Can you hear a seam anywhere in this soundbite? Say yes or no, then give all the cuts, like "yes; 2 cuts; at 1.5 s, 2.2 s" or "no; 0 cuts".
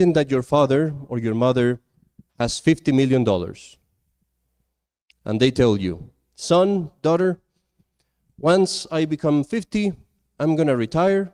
no; 0 cuts